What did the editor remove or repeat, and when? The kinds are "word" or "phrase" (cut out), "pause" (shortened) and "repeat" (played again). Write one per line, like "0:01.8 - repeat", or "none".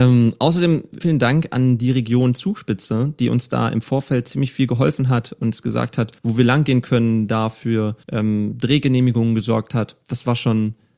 0:01.0 - word
0:06.2 - pause
0:08.0 - pause

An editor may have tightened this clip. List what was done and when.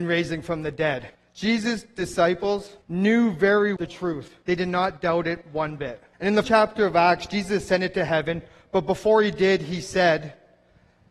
0:01.1 - pause
0:02.8 - pause
0:03.8 - word
0:04.4 - pause
0:06.1 - pause
0:06.4 - word

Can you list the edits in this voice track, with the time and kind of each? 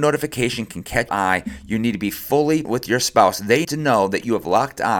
0:01.1 - word
0:02.6 - word
0:03.6 - word

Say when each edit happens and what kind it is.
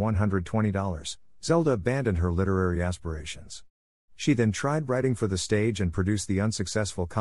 none

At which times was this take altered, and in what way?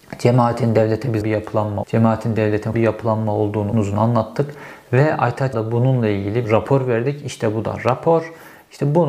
0:01.2 - word
0:01.8 - word
0:02.7 - word
0:03.7 - word
0:05.5 - word
0:06.4 - word

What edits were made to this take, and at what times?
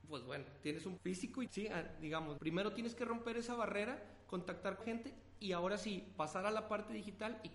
0:01.0 - word
0:01.5 - word
0:02.4 - word
0:04.8 - word

